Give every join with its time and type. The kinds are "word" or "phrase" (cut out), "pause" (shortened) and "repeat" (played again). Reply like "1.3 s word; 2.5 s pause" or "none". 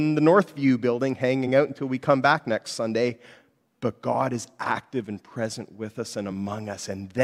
none